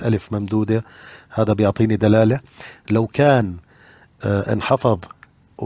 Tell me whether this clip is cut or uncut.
uncut